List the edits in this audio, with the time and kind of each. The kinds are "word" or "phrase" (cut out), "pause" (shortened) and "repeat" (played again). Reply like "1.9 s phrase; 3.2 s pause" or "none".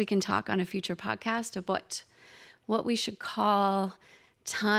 none

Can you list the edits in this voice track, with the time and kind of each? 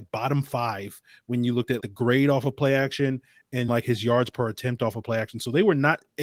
1.8 s word; 3.7 s word

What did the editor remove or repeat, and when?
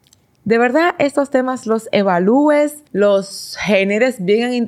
2.9 s pause

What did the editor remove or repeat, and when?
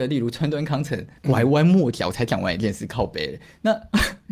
1.2 s pause

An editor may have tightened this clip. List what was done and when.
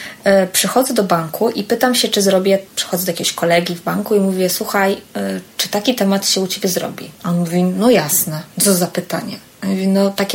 2.7 s pause; 7.2 s pause; 8.5 s pause

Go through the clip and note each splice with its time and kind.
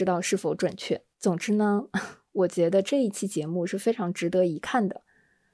1.1 s pause

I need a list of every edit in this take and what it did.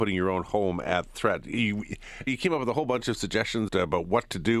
2.3 s word; 3.7 s word

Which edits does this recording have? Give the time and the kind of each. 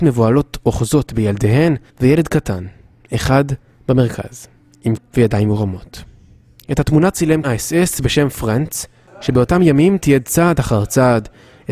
1.9 s pause; 5.0 s word; 7.4 s word

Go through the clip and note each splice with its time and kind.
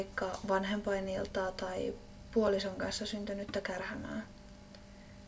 none

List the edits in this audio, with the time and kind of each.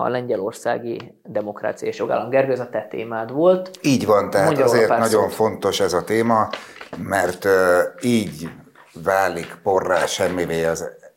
none

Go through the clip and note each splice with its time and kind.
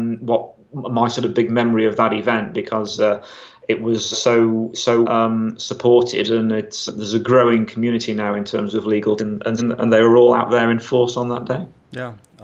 4.1 s word; 5.0 s word; 6.9 s word; 9.2 s word; 9.6 s word

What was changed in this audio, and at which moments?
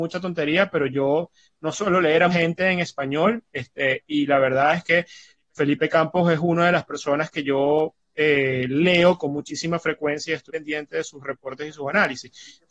2.3 s word; 10.5 s word

